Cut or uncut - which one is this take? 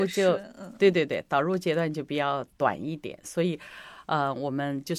uncut